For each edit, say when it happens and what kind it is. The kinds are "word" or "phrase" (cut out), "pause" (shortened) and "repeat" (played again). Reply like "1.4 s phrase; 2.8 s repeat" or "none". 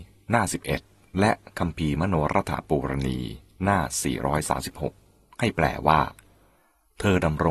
none